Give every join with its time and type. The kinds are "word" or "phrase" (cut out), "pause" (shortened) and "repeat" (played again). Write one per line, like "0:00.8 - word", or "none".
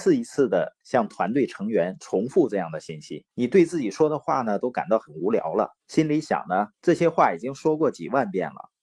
0:03.3 - pause
0:05.8 - pause
0:06.7 - pause